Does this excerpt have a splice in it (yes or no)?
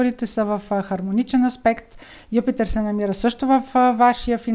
no